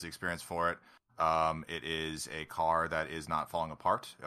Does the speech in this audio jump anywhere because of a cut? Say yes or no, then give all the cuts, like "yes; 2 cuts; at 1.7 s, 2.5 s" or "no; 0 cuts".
no; 0 cuts